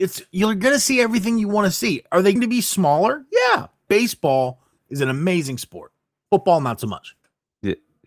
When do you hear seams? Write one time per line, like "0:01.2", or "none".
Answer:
0:02.4
0:03.9
0:04.8